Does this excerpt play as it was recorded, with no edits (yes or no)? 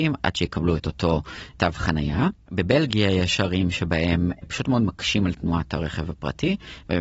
no